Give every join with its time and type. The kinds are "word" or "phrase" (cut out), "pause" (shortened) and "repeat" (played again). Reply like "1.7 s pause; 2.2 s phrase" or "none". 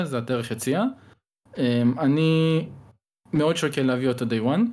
none